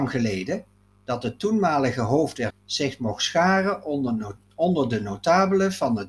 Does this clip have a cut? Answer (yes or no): yes